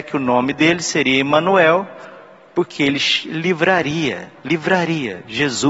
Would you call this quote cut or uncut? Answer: uncut